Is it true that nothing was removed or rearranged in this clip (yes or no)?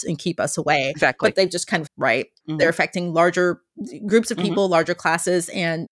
no